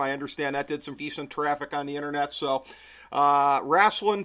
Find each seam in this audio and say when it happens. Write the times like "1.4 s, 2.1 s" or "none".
1.0 s